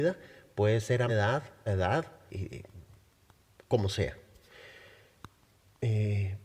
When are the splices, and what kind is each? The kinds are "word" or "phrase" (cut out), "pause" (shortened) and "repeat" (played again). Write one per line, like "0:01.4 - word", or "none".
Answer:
0:01.1 - word
0:01.7 - word
0:02.3 - word